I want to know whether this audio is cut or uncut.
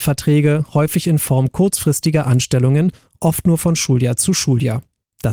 uncut